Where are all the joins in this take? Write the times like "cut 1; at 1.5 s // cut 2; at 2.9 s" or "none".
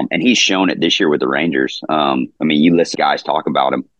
cut 1; at 2.4 s // cut 2; at 2.9 s